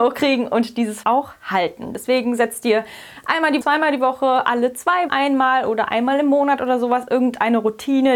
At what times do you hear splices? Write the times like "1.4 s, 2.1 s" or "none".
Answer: 1.0 s, 3.6 s, 5.1 s